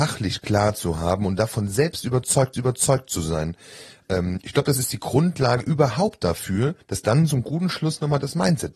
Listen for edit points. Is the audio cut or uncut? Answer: cut